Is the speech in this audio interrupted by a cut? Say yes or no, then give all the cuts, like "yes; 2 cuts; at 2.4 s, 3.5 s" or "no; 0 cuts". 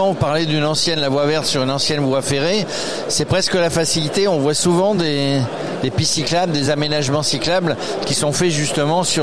no; 0 cuts